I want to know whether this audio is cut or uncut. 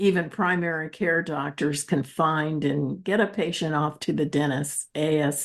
uncut